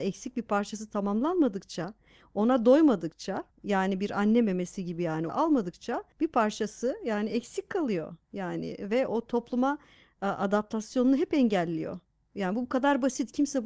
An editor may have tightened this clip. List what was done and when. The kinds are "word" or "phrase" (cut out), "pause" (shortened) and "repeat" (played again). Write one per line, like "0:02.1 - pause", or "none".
0:03.5 - pause
0:05.3 - phrase
0:06.1 - pause
0:09.1 - word